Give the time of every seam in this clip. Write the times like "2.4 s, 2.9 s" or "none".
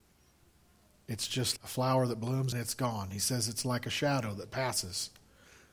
1.6 s, 2.5 s

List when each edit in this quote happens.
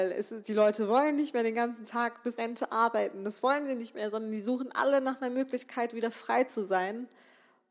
2.4 s

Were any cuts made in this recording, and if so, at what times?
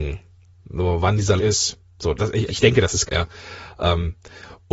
1.4 s, 2.1 s, 2.5 s, 3.1 s

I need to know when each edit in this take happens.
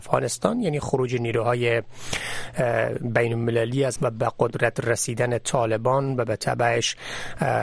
4.0 s

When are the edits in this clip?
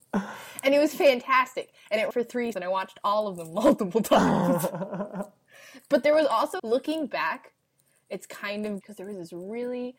2.1 s, 2.5 s, 6.6 s, 8.8 s

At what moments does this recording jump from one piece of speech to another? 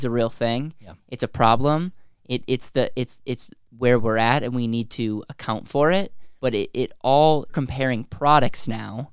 6.4 s, 7.5 s

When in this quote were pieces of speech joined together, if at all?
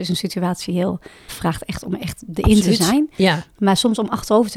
1.3 s

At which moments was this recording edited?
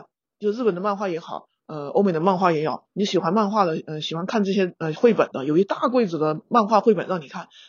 2.9 s

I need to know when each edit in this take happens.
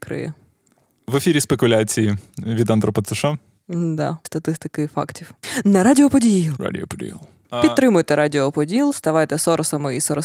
4.2 s

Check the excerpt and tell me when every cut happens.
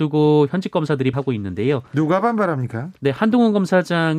1.1 s, 3.0 s

